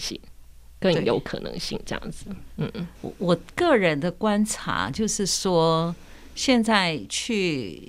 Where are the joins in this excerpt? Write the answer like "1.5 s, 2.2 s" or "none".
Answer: 3.0 s